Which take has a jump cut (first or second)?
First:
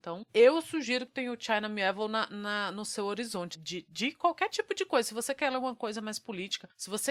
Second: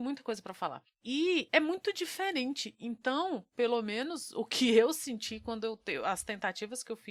first